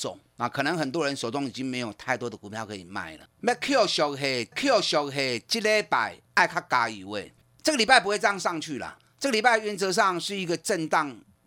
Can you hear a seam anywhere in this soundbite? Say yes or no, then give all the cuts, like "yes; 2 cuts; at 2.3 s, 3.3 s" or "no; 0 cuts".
yes; 1 cut; at 4.5 s